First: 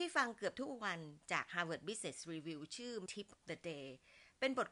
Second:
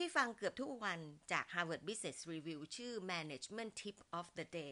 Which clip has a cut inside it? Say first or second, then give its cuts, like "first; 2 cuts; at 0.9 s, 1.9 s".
first; 2 cuts; at 3.1 s, 3.4 s